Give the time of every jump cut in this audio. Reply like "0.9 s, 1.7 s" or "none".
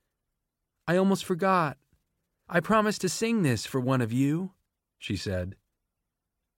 none